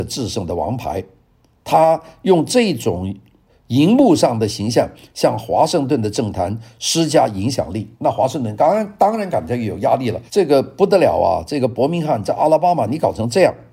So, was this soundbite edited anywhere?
yes; 2 cuts; at 7.9 s, 10.3 s

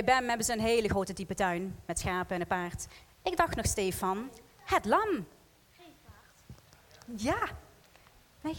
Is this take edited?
no; 0 cuts

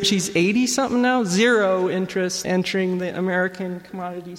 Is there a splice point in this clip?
yes; 1 cut; at 2.4 s

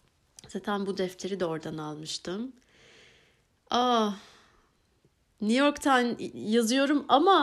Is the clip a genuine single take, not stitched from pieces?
yes; 0 cuts

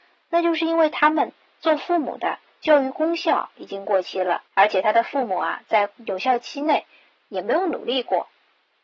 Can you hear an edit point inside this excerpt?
yes; 1 cut; at 4.5 s

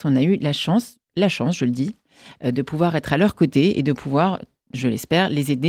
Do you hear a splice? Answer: no; 0 cuts

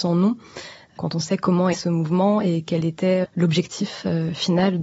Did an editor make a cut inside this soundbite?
yes; 2 cuts; at 1.7 s, 3.2 s

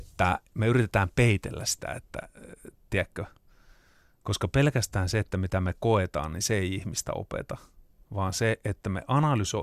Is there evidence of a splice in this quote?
no; 0 cuts

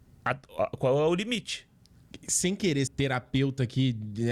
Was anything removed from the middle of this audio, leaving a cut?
yes; 1 cut; at 2.9 s

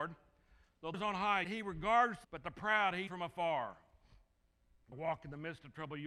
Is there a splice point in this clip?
yes; 5 cuts; at 0.9 s, 1.4 s, 2.2 s, 3.1 s, 4.9 s

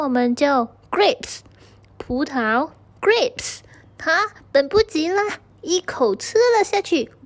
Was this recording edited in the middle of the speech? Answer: no; 0 cuts

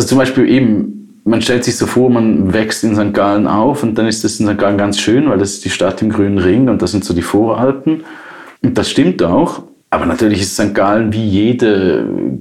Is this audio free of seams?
no; 1 cut; at 8.6 s

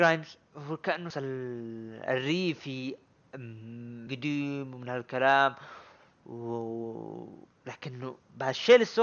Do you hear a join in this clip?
yes; 2 cuts; at 1.1 s, 4.1 s

